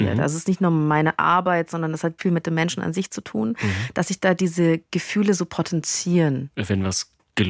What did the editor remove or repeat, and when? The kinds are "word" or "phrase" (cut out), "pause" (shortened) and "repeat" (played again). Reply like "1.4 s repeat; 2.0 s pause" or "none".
2.2 s word